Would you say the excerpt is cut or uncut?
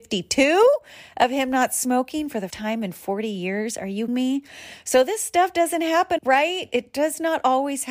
cut